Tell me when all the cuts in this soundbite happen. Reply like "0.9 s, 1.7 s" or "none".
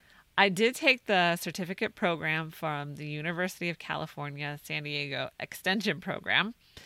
none